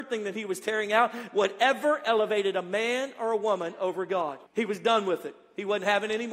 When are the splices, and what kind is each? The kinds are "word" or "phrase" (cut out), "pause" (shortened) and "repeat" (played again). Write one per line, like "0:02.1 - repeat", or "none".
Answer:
0:04.5 - pause